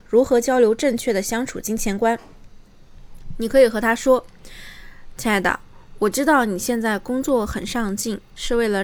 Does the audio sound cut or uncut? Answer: uncut